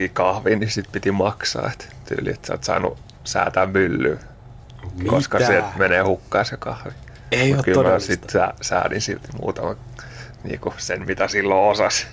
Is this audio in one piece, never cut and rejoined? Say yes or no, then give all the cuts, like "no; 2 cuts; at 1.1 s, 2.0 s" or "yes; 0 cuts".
yes; 0 cuts